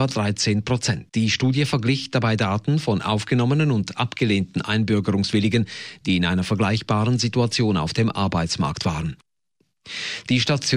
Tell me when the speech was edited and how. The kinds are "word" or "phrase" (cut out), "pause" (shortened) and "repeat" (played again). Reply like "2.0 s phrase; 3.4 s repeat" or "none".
1.1 s pause

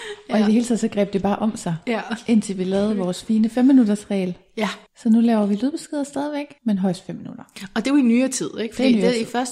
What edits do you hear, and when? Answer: 4.9 s pause; 6.6 s pause

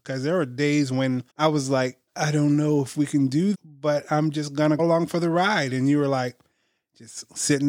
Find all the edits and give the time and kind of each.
1.3 s pause; 2.1 s pause; 3.5 s phrase; 4.8 s word

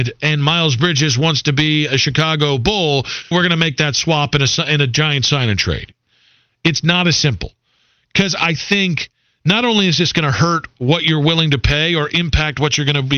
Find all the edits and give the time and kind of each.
3.3 s word

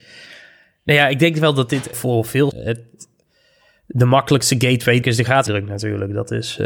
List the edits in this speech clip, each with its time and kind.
1.9 s word; 2.5 s word; 5.0 s word; 5.5 s word

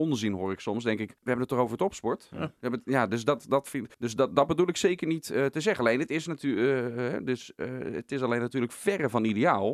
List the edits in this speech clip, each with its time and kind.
1.2 s pause; 3.9 s pause

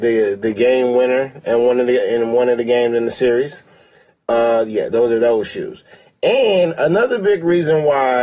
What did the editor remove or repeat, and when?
none

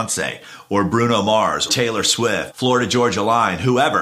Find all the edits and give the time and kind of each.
1.7 s word; 2.5 s word

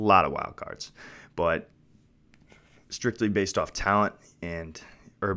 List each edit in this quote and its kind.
none

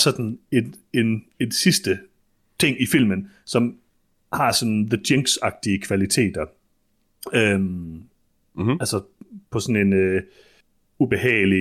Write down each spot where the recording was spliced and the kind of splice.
none

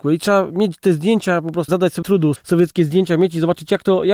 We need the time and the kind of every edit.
1.7 s word; 2.0 s word; 2.4 s word

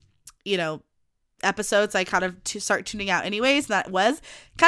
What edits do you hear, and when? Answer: none

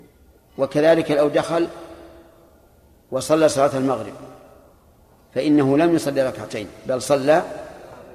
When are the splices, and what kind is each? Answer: none

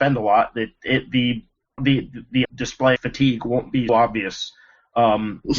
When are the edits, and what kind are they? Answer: 1.8 s word; 2.4 s word; 3.0 s word; 3.9 s word

